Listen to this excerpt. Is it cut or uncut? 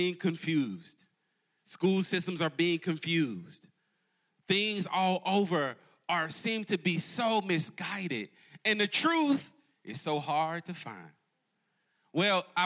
uncut